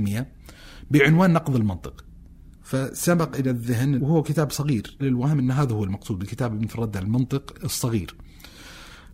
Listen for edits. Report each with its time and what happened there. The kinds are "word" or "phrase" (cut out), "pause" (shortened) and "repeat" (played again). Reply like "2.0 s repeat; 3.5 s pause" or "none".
2.5 s pause; 4.0 s word; 5.0 s phrase; 6.7 s word

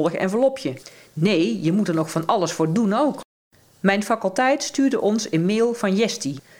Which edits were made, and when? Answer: none

